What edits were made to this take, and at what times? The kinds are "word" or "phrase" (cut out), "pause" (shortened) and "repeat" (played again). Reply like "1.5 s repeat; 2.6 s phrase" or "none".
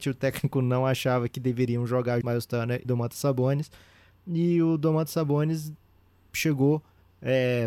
2.2 s word; 2.8 s word